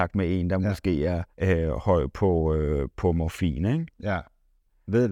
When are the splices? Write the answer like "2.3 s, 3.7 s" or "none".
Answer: 1.3 s